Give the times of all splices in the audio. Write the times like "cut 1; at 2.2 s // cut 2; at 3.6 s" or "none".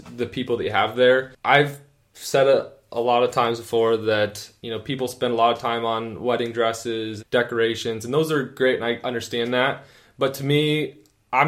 cut 1; at 7.2 s